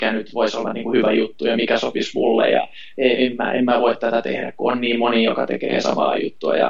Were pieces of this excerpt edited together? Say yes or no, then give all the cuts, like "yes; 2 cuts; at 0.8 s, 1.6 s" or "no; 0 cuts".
no; 0 cuts